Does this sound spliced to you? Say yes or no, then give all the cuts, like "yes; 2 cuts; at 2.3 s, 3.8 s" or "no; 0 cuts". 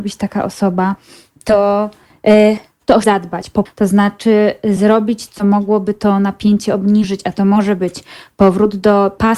yes; 3 cuts; at 3.0 s, 3.7 s, 5.3 s